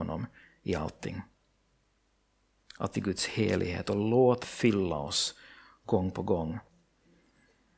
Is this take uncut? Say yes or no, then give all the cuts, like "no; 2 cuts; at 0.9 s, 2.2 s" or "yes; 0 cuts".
no; 2 cuts; at 2.9 s, 4.4 s